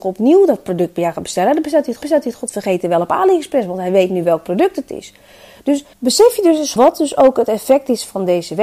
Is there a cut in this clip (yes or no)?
yes